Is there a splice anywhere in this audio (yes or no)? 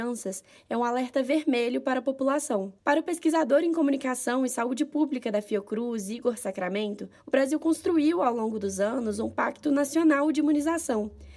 yes